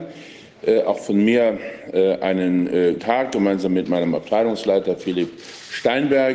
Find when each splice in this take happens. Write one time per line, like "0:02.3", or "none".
0:03.0